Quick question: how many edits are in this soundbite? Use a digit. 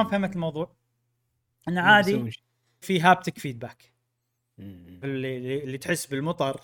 2